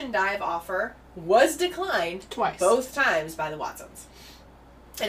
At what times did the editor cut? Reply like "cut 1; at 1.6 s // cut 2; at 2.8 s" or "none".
none